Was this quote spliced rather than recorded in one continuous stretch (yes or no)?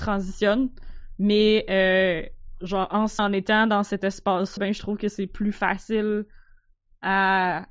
yes